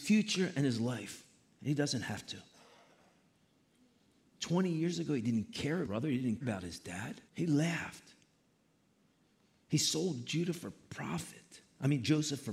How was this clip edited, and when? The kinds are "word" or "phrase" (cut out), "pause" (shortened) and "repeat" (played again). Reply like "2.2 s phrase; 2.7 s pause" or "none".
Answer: 5.8 s phrase; 6.4 s word; 7.3 s pause